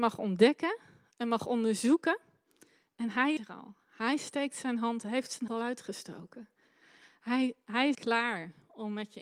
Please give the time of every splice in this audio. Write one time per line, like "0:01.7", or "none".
0:03.4
0:05.5
0:07.9